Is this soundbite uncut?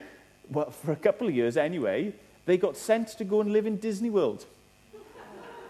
yes; 0 cuts

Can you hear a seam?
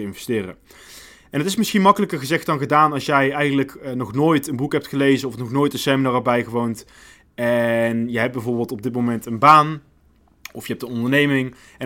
no; 0 cuts

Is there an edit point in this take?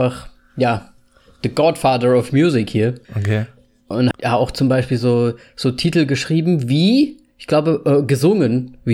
yes; 2 cuts; at 3.0 s, 4.1 s

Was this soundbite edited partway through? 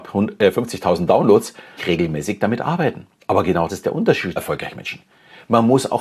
yes; 4 cuts; at 1.8 s, 3.2 s, 3.7 s, 4.4 s

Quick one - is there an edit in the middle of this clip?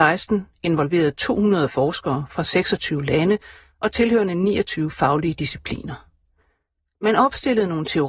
no; 0 cuts

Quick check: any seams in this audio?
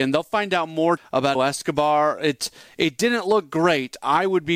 yes; 2 cuts; at 1.0 s, 1.3 s

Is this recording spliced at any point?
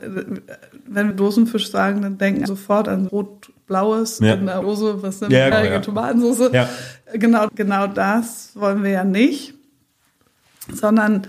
yes; 6 cuts; at 1.1 s, 2.5 s, 3.1 s, 4.6 s, 5.5 s, 7.5 s

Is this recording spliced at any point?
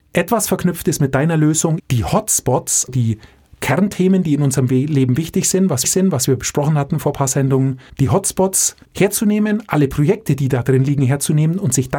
yes; 5 cuts; at 1.8 s, 2.9 s, 5.8 s, 7.9 s, 8.8 s

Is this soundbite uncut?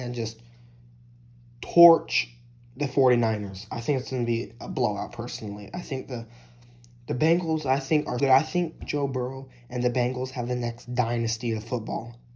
no; 1 cut; at 8.2 s

